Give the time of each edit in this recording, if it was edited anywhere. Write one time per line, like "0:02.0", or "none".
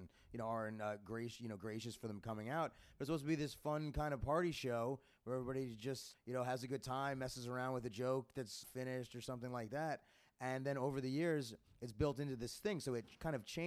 0:06.1
0:08.6